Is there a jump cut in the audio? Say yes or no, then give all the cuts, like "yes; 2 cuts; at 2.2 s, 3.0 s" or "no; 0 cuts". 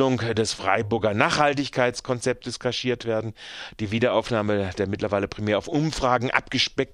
no; 0 cuts